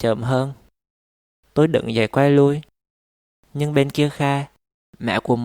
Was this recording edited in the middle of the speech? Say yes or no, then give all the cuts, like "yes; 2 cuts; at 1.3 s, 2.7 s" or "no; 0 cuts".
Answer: no; 0 cuts